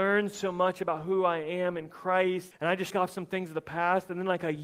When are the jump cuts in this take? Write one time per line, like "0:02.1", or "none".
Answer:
0:02.5
0:02.9